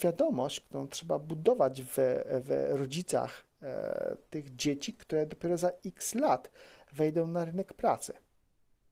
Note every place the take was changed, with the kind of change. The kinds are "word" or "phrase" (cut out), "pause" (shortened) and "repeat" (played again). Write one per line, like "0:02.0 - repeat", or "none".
none

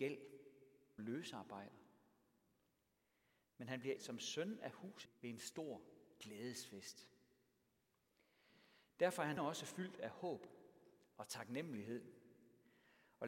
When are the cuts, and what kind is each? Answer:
0:01.0 - word
0:04.0 - word
0:05.1 - word
0:09.4 - word

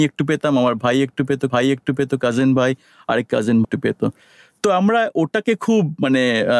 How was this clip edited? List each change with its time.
0:01.5 - repeat
0:03.6 - word

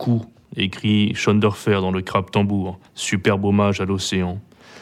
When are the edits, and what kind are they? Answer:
0:02.9 - pause

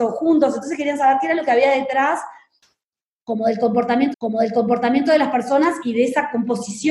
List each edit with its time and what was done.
0:04.1 - repeat

